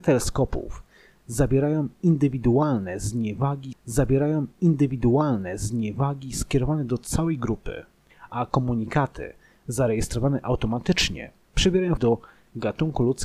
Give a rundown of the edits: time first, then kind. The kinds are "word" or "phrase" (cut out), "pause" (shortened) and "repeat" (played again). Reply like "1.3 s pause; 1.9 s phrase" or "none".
3.7 s repeat; 12.0 s phrase